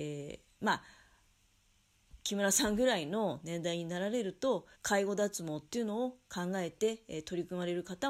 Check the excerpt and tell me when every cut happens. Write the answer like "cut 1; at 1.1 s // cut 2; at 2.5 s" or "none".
cut 1; at 4.7 s